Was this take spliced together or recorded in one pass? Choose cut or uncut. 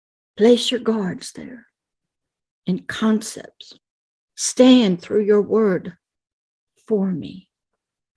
uncut